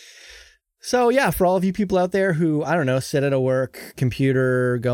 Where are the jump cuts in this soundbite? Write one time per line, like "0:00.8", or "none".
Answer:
none